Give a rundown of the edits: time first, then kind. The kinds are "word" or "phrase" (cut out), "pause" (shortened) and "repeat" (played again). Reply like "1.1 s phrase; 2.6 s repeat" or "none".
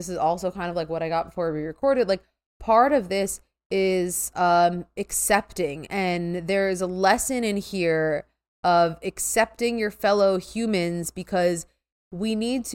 none